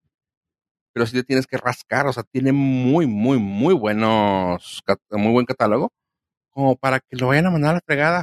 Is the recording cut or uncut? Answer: uncut